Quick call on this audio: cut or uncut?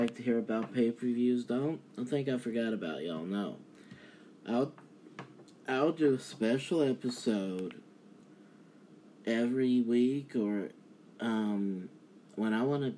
uncut